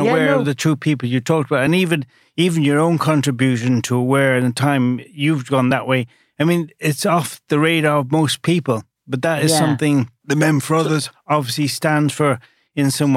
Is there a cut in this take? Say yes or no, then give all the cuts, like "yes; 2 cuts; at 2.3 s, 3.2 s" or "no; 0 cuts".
no; 0 cuts